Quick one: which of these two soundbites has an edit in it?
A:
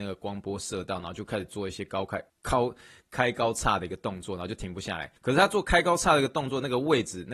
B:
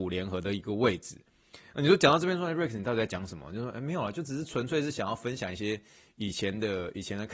A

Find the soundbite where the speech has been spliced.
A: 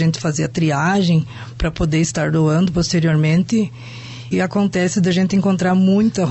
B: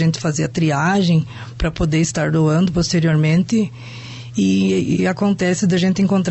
A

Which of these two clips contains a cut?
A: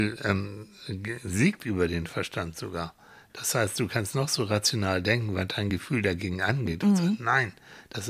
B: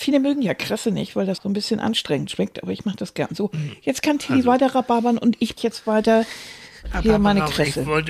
B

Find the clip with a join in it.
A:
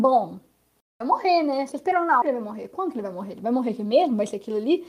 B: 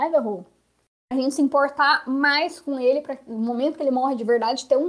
A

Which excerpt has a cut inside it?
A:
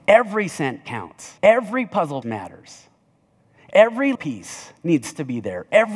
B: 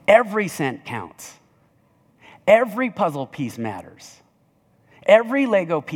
A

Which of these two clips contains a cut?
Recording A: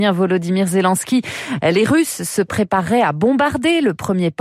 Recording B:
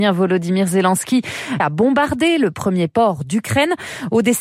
B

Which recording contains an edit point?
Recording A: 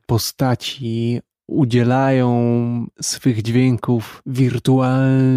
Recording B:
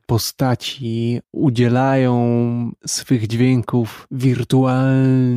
B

